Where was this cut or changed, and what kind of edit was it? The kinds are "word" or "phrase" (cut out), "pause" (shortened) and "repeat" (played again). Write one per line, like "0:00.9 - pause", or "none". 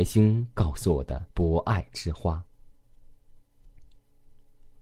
0:01.3 - pause